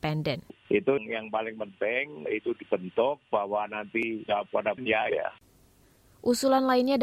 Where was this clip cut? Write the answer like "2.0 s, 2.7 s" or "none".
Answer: 1.0 s, 2.3 s, 4.3 s, 4.8 s, 5.1 s